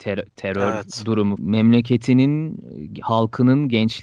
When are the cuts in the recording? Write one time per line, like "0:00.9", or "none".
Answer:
0:01.4